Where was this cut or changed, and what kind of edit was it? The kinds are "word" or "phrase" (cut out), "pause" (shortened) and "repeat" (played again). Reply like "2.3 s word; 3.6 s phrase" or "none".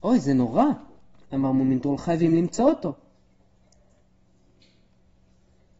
none